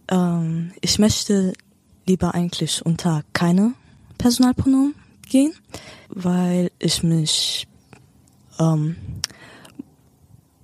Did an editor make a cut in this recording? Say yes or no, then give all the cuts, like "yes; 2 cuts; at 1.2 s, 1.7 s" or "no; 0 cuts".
no; 0 cuts